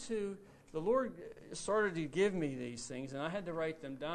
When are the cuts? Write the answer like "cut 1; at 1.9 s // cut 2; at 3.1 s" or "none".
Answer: none